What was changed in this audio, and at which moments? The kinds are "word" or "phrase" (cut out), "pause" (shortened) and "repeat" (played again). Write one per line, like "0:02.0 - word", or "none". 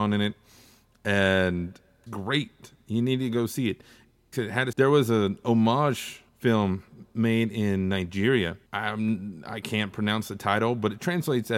0:02.1 - phrase
0:04.3 - word
0:04.7 - word
0:06.3 - pause
0:08.7 - pause